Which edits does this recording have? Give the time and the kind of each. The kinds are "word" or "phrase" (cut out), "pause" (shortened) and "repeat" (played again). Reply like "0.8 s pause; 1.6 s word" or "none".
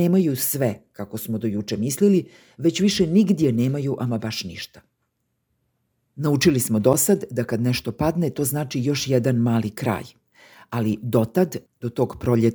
none